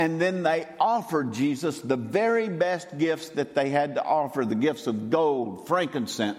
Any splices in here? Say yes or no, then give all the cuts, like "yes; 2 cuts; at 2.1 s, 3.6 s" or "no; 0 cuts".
no; 0 cuts